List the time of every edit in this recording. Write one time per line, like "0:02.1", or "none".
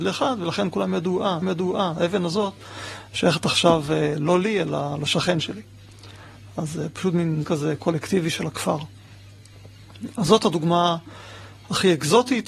0:01.4
0:07.4